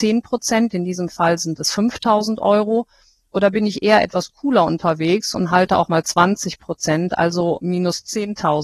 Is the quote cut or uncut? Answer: uncut